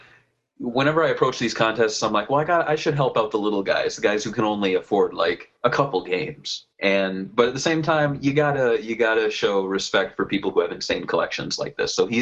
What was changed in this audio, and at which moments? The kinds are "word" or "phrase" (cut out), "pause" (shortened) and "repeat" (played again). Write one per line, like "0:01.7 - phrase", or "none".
0:05.6 - pause
0:06.7 - pause